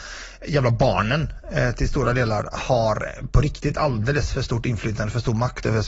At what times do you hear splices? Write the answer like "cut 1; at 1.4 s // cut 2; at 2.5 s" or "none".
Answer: none